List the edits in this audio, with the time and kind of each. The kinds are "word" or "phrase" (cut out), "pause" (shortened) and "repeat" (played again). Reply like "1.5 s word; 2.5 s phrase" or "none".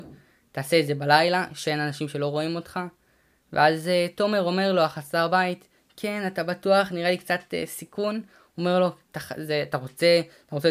none